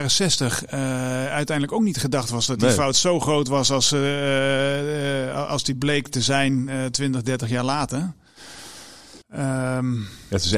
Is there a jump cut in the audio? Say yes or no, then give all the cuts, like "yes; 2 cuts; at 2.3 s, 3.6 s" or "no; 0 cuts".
yes; 1 cut; at 9.2 s